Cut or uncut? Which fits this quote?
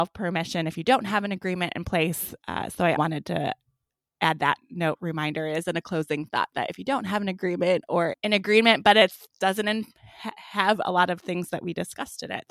cut